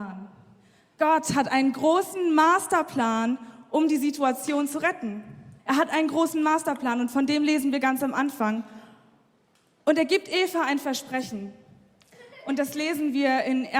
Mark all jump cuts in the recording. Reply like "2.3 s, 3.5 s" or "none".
5.6 s